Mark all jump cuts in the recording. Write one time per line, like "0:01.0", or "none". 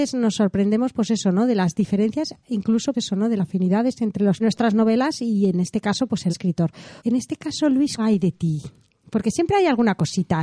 0:02.4
0:02.9
0:03.4
0:04.4
0:06.3
0:07.0
0:08.0